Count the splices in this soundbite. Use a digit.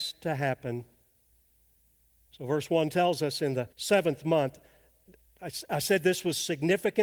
1